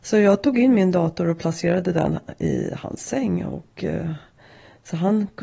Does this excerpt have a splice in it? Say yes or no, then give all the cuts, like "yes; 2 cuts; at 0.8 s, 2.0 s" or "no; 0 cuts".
no; 0 cuts